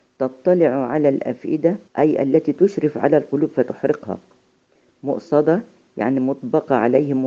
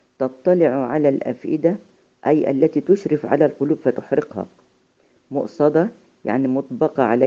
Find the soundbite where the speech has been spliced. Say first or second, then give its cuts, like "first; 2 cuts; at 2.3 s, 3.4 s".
first; 1 cut; at 1.9 s